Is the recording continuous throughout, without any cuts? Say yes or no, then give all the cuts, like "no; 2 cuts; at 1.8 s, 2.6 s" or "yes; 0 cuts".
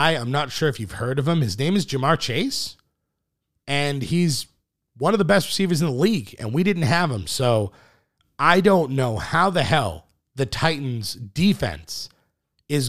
yes; 0 cuts